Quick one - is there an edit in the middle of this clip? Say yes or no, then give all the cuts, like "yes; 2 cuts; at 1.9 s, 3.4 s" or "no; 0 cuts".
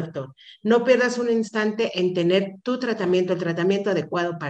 no; 0 cuts